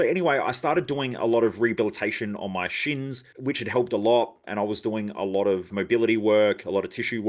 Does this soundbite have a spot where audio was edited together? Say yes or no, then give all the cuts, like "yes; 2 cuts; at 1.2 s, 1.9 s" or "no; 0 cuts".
yes; 1 cut; at 5.7 s